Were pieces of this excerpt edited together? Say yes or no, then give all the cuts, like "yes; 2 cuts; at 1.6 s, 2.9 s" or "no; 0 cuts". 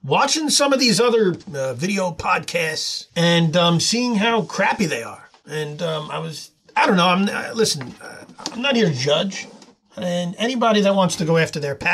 no; 0 cuts